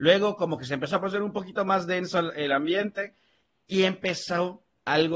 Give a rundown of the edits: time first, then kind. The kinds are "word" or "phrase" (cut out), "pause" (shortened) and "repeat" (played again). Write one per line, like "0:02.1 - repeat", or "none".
none